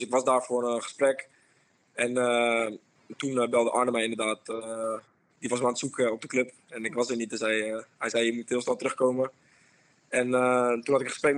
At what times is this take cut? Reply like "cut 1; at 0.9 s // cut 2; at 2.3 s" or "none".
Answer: none